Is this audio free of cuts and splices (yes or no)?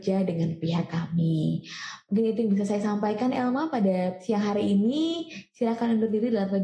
yes